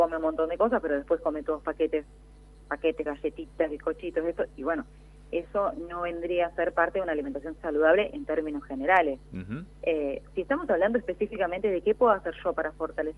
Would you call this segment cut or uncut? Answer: cut